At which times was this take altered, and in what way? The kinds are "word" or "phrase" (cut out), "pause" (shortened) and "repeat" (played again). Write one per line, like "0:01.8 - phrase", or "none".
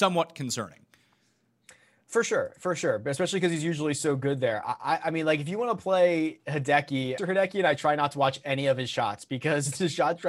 0:07.2 - phrase

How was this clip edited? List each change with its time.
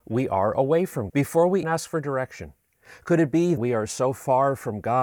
0:01.1 - word
0:01.6 - word
0:03.6 - word

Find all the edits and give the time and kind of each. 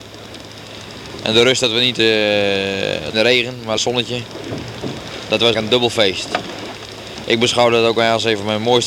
0:01.9 - word
0:03.1 - phrase
0:03.8 - phrase
0:05.5 - word

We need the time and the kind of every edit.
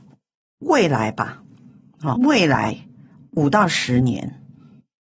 0:02.2 - word

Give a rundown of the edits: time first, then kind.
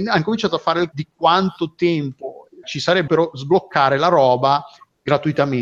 0:00.9 - word
0:02.6 - word
0:03.1 - word

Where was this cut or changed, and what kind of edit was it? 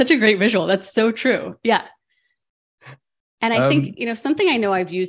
none

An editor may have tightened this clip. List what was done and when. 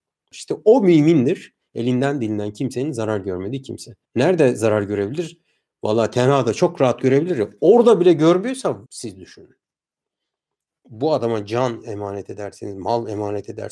0:04.0 - pause
0:08.9 - pause

